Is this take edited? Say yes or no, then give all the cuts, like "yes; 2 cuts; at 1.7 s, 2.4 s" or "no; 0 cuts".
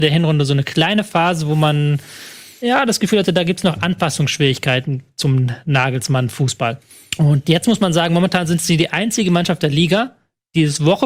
yes; 1 cut; at 6.9 s